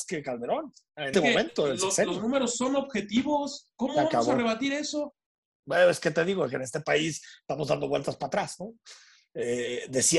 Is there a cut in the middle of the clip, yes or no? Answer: yes